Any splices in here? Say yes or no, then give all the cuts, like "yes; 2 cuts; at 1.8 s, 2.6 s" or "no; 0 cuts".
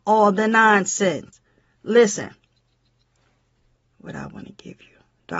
no; 0 cuts